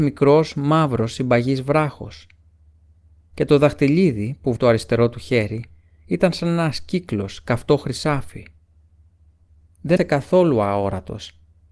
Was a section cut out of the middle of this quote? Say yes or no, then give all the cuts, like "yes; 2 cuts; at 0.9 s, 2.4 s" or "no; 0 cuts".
yes; 2 cuts; at 4.6 s, 10.0 s